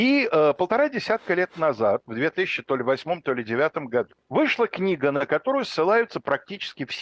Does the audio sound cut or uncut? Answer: cut